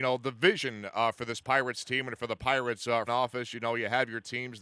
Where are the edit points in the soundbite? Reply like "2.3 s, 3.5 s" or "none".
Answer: 3.1 s